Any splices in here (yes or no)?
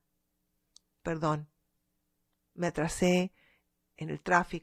no